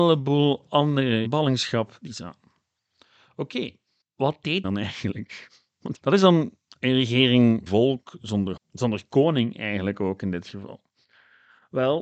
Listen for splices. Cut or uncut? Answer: cut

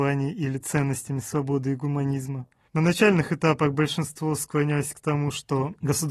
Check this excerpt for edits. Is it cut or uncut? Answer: uncut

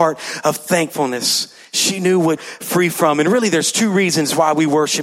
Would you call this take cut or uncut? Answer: cut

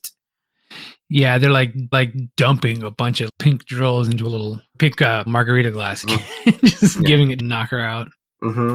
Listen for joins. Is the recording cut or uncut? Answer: cut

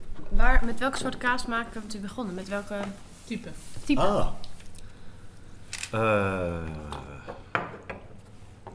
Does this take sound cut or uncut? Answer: cut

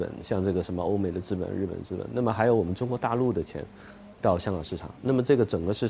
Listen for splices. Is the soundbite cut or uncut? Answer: uncut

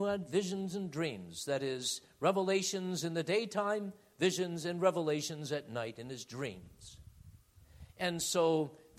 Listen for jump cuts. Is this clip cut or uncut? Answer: uncut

